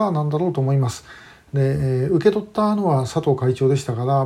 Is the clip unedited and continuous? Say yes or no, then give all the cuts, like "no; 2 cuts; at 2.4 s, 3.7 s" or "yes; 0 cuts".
yes; 0 cuts